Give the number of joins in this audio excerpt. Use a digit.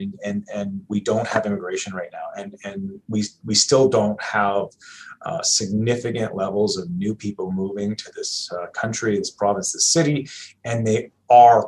0